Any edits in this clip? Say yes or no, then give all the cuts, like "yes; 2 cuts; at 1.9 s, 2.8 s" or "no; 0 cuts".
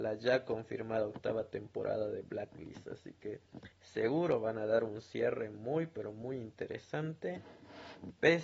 yes; 1 cut; at 3.7 s